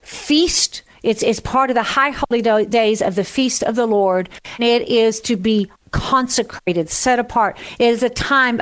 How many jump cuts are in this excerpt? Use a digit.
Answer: 2